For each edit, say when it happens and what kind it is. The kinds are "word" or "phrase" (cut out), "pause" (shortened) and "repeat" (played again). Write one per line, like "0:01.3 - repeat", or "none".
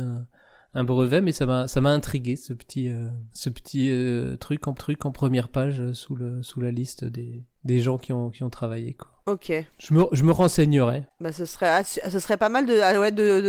0:03.3 - pause
0:04.8 - repeat